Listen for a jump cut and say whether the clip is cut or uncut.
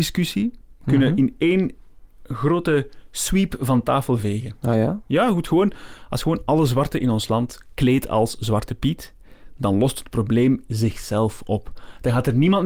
uncut